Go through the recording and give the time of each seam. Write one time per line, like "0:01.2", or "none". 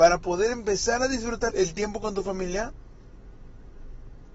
0:01.5